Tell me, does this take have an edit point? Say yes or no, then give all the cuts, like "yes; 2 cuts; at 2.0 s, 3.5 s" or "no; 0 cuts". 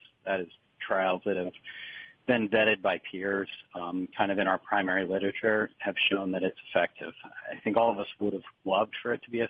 no; 0 cuts